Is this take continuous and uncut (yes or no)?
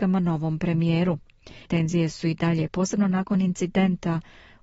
no